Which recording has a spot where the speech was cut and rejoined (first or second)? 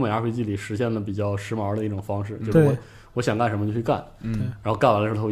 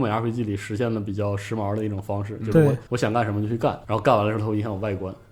second